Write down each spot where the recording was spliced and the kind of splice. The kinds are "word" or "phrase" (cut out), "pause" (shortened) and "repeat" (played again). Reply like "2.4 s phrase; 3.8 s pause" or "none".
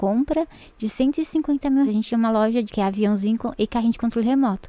1.8 s word; 2.7 s word